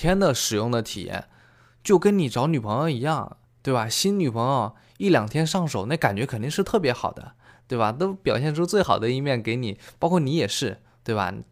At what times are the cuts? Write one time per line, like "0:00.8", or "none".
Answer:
none